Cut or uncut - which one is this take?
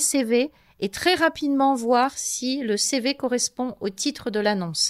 uncut